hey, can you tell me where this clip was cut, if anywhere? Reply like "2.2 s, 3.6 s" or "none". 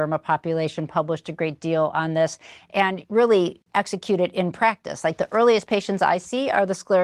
none